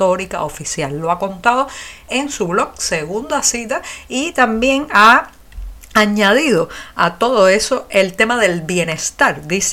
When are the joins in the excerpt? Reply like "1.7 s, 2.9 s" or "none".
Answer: none